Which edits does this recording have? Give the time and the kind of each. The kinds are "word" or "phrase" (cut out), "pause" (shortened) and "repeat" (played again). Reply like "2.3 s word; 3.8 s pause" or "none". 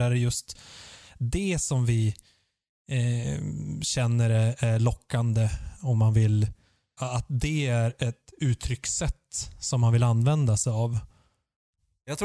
7.0 s word